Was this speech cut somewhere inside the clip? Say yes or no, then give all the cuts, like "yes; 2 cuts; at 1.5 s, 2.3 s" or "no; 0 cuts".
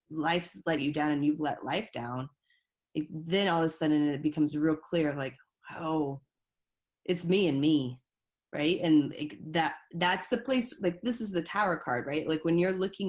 no; 0 cuts